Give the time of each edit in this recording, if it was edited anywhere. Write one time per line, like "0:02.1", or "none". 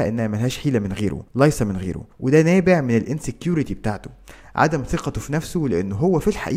0:01.3
0:02.1